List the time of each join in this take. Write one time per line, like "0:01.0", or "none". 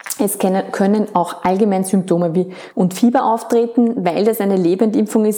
0:02.7

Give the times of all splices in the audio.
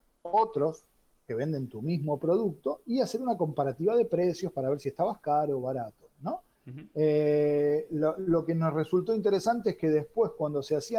none

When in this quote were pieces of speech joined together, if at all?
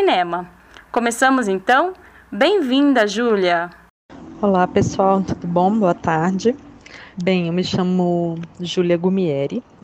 0:07.1

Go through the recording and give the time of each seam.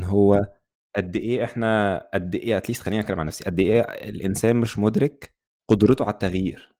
none

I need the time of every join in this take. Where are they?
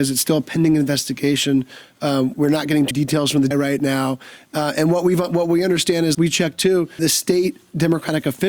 0:02.3
0:02.9
0:03.5
0:06.1
0:07.0

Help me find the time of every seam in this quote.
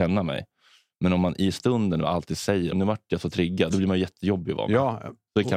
0:02.7
0:03.7

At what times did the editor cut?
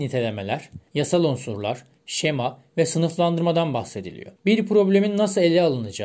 0:04.4

